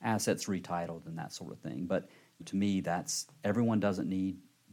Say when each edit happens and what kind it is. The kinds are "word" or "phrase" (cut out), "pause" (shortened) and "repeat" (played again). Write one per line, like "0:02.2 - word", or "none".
0:02.4 - word